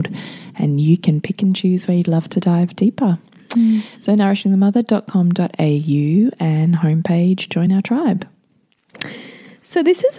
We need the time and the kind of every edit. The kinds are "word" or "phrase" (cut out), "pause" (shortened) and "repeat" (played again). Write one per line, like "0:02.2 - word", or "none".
none